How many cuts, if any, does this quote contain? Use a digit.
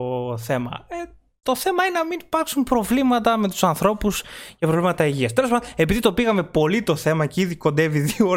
0